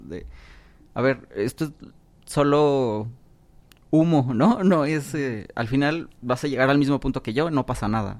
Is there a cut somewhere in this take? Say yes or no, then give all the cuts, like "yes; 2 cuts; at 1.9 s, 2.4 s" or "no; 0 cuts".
no; 0 cuts